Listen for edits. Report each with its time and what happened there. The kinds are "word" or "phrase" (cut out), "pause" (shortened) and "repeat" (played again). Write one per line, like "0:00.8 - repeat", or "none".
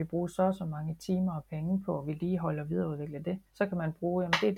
0:03.5 - pause